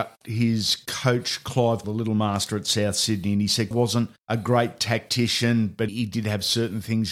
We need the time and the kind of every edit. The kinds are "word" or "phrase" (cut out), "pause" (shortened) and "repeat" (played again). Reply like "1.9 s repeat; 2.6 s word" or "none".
1.8 s word; 3.7 s word; 4.2 s pause; 5.9 s word